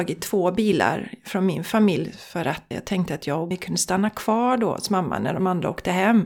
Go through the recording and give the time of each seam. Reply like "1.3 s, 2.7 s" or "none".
2.7 s, 3.5 s